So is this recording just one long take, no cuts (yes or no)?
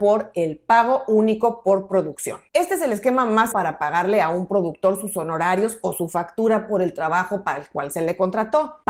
no